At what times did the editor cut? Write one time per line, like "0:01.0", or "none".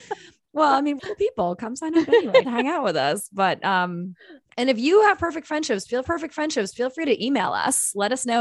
0:01.0
0:02.4
0:04.4
0:06.0

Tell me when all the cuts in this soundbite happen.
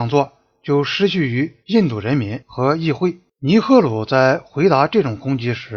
0:01.6

